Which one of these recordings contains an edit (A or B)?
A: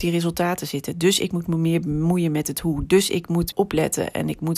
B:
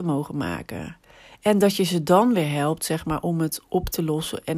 A